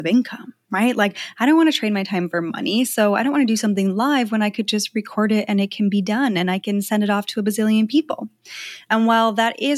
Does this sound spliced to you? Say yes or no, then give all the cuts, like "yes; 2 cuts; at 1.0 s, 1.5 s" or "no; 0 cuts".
no; 0 cuts